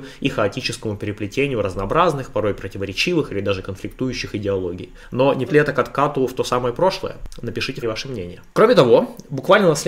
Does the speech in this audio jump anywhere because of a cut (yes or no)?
yes